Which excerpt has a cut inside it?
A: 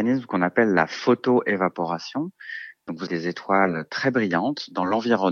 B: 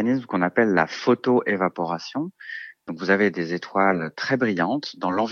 A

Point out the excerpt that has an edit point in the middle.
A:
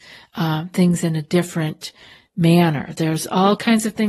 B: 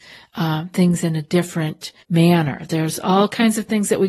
B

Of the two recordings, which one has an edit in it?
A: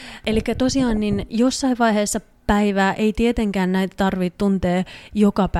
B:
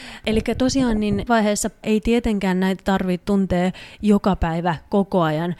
B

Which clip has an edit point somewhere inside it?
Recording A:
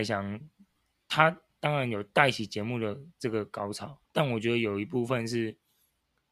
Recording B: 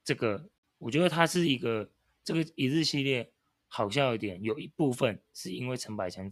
A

